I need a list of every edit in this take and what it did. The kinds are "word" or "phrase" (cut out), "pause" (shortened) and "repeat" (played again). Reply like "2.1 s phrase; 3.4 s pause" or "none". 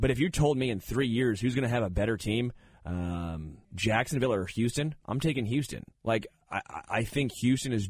3.6 s pause; 5.0 s pause; 5.9 s pause

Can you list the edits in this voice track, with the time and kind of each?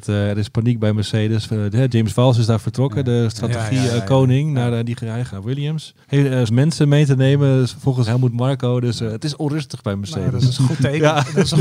5.3 s word; 6.0 s pause; 6.5 s word; 8.1 s word

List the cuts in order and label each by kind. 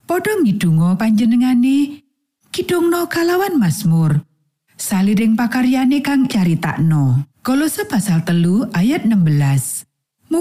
1.0 s word; 6.3 s phrase; 7.3 s pause

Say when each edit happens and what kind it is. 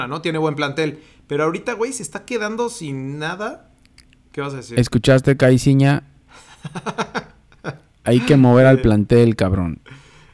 none

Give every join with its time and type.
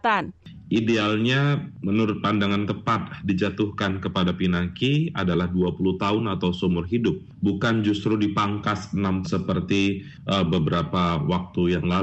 2.7 s phrase; 9.2 s word

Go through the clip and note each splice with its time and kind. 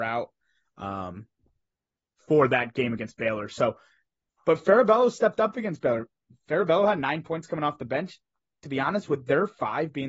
none

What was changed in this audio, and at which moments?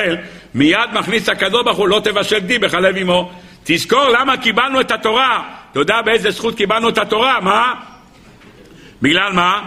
none

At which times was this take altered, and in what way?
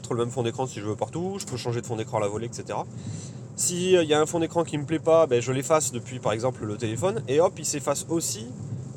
none

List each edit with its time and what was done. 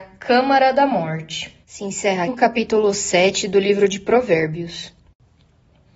1.6 s pause; 2.3 s word

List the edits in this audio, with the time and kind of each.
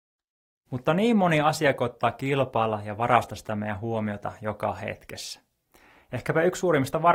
none

